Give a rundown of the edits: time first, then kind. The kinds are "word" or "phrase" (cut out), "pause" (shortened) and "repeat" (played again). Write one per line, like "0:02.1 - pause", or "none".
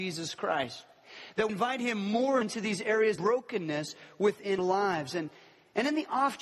0:01.5 - word
0:02.4 - word
0:03.2 - word
0:04.6 - word